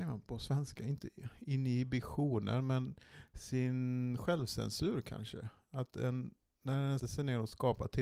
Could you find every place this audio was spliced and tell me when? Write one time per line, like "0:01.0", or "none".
0:07.0